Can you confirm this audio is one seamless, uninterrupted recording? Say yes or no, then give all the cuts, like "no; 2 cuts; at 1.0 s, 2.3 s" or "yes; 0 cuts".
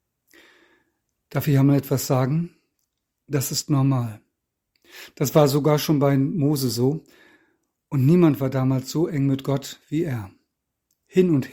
yes; 0 cuts